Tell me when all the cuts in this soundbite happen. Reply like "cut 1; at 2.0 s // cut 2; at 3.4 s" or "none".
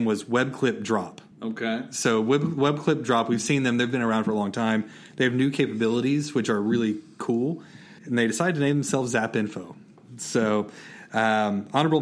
cut 1; at 1.3 s // cut 2; at 8.0 s